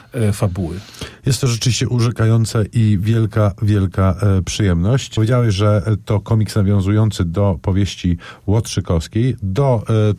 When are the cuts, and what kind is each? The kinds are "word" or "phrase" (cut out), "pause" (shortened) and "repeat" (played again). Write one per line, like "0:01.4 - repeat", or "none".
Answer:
none